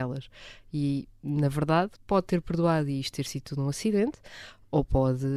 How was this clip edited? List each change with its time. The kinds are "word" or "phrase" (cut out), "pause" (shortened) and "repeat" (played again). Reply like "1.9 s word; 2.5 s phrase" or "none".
2.0 s pause